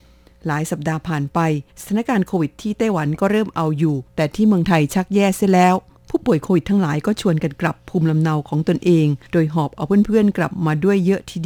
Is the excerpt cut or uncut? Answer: cut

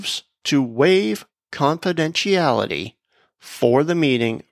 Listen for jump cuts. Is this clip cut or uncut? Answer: uncut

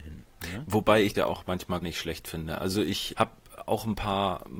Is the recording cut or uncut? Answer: cut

